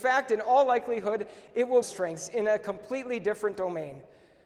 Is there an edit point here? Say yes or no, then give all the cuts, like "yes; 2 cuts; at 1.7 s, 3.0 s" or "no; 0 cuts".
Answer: yes; 1 cut; at 1.8 s